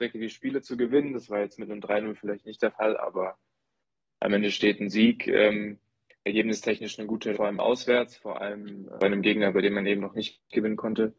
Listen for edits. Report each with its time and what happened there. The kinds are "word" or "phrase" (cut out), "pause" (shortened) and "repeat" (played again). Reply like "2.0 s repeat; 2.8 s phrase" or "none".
7.3 s word; 9.0 s word